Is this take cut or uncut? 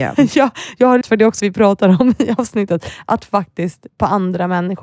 cut